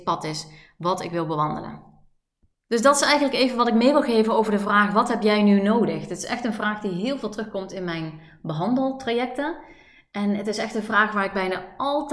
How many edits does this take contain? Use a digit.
0